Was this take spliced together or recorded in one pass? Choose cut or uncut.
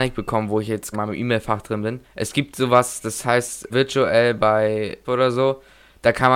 cut